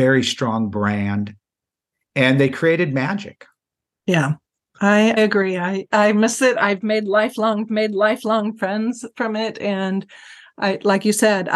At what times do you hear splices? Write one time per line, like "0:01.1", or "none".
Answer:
0:05.2
0:07.7